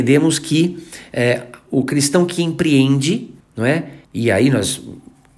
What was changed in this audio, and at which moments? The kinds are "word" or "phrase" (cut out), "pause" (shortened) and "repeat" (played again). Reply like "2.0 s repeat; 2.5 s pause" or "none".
3.4 s pause; 4.0 s pause